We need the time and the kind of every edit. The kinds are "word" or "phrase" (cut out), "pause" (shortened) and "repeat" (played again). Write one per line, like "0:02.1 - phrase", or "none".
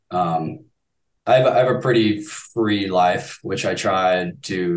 none